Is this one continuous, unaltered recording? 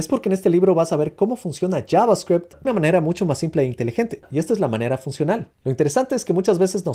no; 1 cut; at 2.6 s

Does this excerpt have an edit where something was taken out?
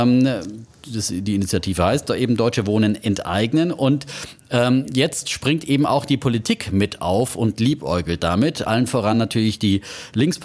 no; 0 cuts

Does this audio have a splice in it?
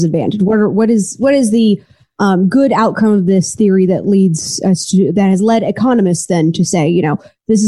no; 0 cuts

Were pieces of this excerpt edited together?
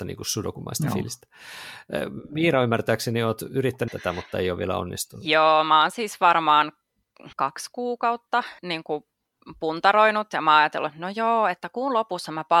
yes; 3 cuts; at 3.9 s, 7.3 s, 8.6 s

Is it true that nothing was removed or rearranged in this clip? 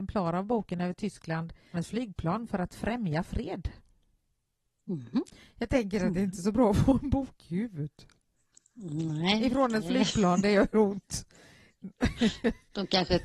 no; 1 cut; at 1.7 s

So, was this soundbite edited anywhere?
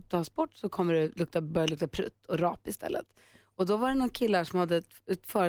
no; 0 cuts

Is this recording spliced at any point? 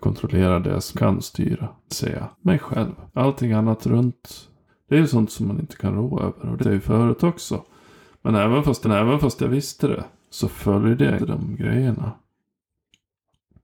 yes; 8 cuts; at 0.9 s, 1.9 s, 2.3 s, 3.1 s, 4.7 s, 6.6 s, 8.8 s, 11.2 s

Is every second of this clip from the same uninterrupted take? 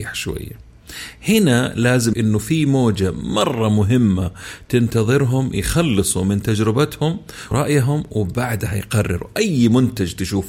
no; 2 cuts; at 2.1 s, 7.5 s

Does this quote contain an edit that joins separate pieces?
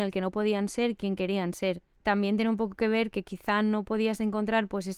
no; 0 cuts

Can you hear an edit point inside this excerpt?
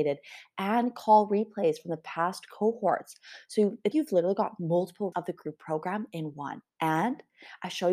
yes; 3 cuts; at 3.9 s, 5.1 s, 6.7 s

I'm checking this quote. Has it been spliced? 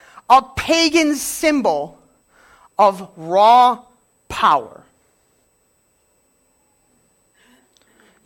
no; 0 cuts

